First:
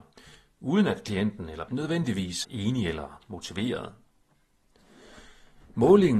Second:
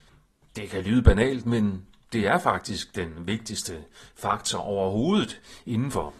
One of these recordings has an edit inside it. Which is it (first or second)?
first